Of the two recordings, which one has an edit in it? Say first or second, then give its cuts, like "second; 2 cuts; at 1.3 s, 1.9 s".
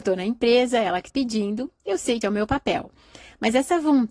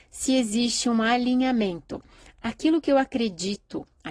first; 2 cuts; at 1.1 s, 2.2 s